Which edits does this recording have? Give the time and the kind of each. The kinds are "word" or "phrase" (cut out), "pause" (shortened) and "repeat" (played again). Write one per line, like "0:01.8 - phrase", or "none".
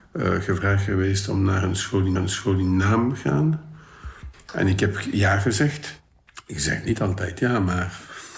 0:02.1 - repeat